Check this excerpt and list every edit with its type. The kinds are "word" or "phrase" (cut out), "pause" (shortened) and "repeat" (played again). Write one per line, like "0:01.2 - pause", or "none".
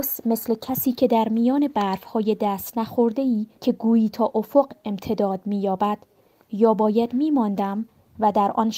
0:03.5 - pause